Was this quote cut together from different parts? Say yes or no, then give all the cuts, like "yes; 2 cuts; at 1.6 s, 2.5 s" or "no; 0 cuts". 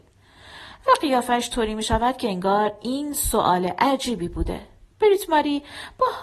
no; 0 cuts